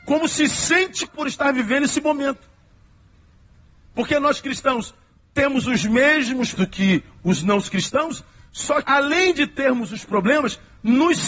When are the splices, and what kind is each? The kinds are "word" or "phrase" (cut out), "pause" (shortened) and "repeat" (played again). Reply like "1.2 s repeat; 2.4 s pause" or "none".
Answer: 1.1 s word; 6.6 s word; 8.8 s word